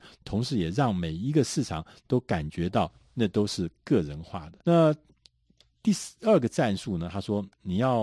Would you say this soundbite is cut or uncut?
cut